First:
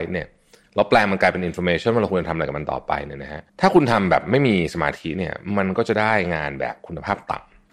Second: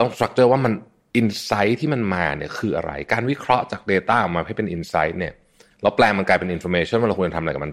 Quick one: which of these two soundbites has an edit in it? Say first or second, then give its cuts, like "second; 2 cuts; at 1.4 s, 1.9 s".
first; 1 cut; at 3.5 s